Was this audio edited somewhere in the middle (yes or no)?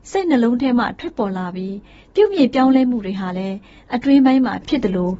no